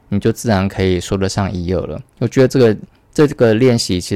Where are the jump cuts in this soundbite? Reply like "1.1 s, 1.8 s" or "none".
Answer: 2.1 s